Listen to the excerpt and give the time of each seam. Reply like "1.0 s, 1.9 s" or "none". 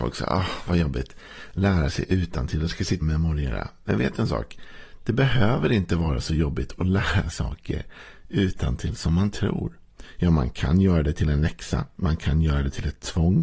3.0 s, 7.3 s